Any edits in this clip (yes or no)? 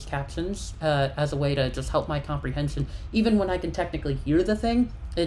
no